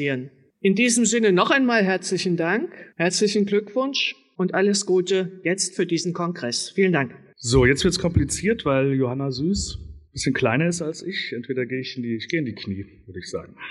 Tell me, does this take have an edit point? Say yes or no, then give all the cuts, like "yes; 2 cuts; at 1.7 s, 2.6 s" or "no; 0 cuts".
yes; 1 cut; at 2.9 s